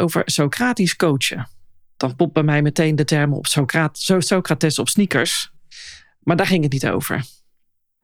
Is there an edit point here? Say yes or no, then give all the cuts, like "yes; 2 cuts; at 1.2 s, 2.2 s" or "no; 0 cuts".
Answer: no; 0 cuts